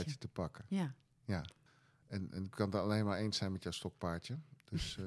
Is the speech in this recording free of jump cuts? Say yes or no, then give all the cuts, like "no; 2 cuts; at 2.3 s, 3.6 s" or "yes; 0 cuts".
no; 1 cut; at 1.7 s